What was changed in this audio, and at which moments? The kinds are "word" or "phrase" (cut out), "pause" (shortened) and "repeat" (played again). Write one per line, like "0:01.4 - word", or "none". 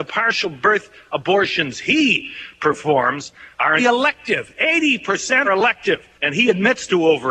0:03.8 - word
0:05.4 - word
0:06.1 - pause